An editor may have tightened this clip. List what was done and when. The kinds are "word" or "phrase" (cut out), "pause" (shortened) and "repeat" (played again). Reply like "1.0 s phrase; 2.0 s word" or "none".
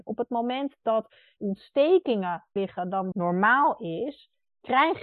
1.4 s word; 2.6 s word; 3.1 s word

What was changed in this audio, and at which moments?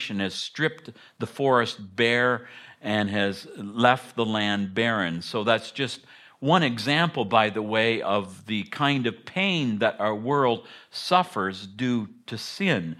none

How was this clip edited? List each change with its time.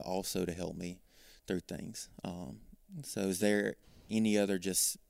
none

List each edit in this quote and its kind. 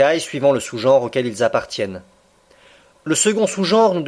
none

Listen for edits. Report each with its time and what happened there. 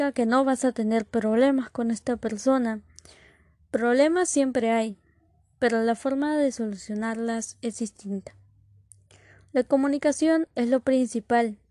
none

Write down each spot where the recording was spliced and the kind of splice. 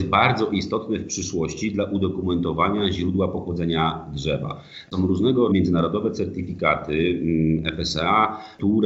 5.5 s word

